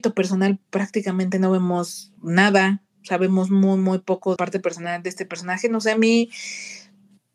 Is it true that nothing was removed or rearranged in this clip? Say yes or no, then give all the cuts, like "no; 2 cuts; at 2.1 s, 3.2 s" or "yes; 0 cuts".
no; 2 cuts; at 2.2 s, 4.4 s